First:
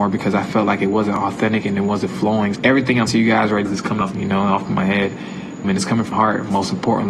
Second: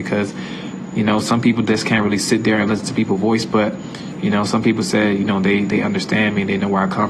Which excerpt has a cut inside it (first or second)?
first